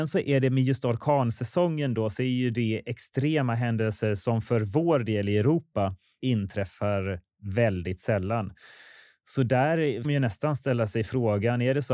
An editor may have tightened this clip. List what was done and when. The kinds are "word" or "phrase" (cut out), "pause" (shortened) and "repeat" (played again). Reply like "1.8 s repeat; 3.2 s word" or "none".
6.2 s word; 10.0 s word